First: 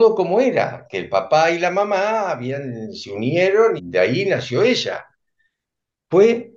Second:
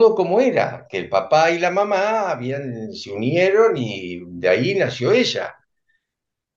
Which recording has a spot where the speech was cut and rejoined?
first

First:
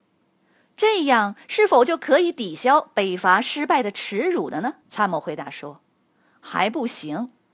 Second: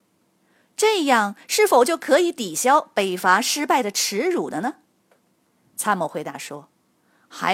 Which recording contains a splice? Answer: first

